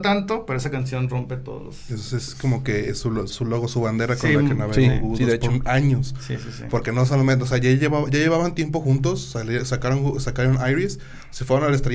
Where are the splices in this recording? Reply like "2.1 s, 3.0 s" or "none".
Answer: 3.3 s

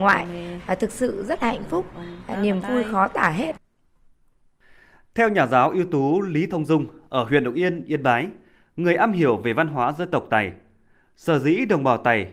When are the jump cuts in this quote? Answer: none

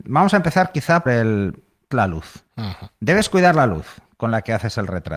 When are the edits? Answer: 1.1 s, 1.9 s, 2.5 s

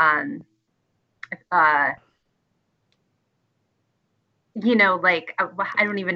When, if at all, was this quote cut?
none

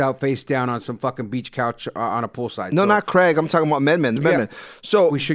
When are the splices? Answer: 4.2 s

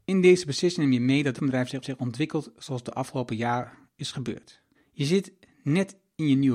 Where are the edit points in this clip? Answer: 1.4 s, 1.8 s, 4.7 s

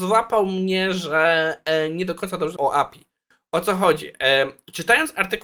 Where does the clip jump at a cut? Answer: 2.6 s

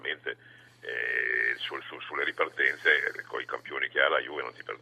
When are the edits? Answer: none

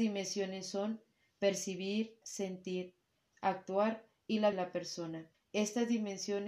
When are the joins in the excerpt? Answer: 2.2 s, 4.5 s, 5.3 s

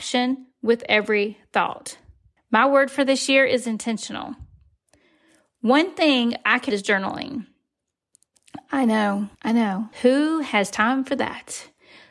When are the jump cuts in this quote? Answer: 2.4 s, 6.7 s, 9.3 s, 9.9 s

